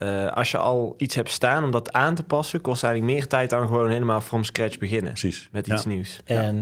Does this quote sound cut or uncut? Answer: uncut